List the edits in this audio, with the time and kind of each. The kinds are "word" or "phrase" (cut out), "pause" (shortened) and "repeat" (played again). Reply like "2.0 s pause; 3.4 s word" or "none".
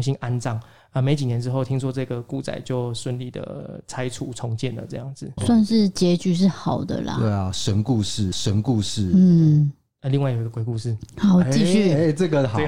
5.4 s word; 8.3 s repeat